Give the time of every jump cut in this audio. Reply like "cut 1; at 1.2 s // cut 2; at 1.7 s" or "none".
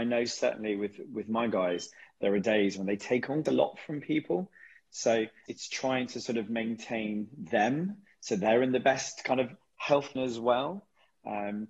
cut 1; at 3.5 s // cut 2; at 5.5 s // cut 3; at 10.2 s